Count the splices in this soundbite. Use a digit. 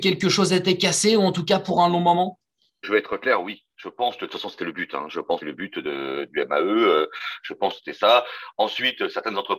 2